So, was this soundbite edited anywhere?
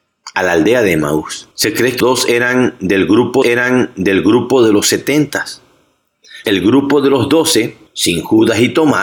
yes; 5 cuts; at 1.5 s, 2.0 s, 3.4 s, 6.4 s, 7.9 s

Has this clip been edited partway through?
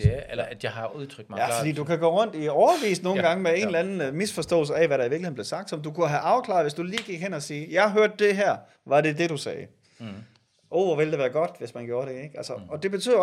no; 0 cuts

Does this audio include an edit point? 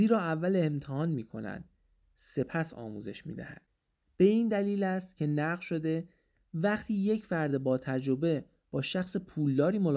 no; 0 cuts

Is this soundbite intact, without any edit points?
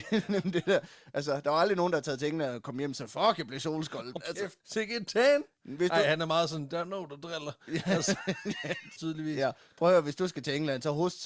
no; 3 cuts; at 4.2 s, 4.6 s, 9.0 s

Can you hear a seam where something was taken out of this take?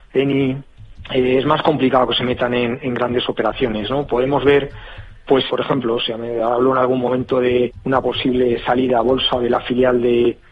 yes; 1 cut; at 5.5 s

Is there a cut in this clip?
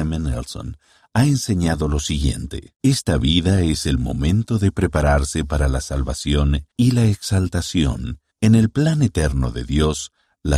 yes; 3 cuts; at 2.8 s, 6.7 s, 8.3 s

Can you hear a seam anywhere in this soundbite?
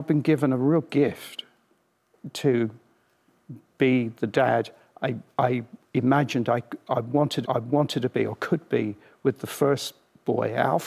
yes; 1 cut; at 7.4 s

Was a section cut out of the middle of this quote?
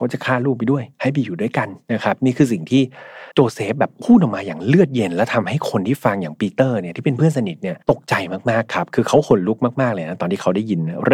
yes; 4 cuts; at 0.9 s, 1.8 s, 3.3 s, 7.8 s

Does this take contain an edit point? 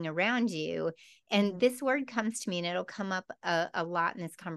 no; 0 cuts

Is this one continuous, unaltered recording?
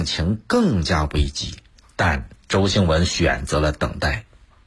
yes; 0 cuts

